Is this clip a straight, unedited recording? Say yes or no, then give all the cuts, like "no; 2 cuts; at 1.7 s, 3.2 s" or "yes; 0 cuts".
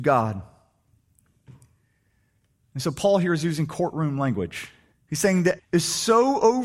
no; 2 cuts; at 4.9 s, 5.6 s